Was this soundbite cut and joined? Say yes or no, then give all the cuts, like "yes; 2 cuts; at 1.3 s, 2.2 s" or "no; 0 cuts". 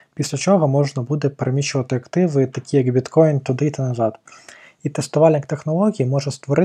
no; 0 cuts